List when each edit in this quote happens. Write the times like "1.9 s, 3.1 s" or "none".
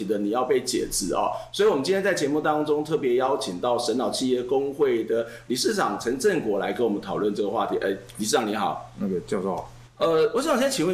none